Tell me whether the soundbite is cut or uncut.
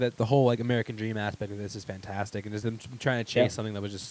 uncut